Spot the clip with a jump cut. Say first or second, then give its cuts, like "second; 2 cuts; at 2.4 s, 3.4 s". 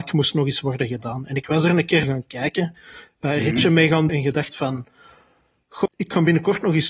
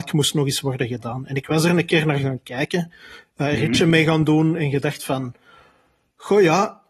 first; 3 cuts; at 2.0 s, 4.1 s, 5.9 s